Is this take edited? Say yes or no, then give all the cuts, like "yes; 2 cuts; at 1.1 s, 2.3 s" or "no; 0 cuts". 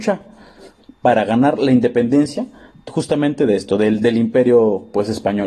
yes; 1 cut; at 2.7 s